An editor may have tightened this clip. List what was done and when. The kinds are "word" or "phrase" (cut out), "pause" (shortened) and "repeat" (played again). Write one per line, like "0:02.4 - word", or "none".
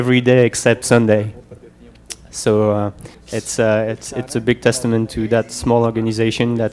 0:03.1 - pause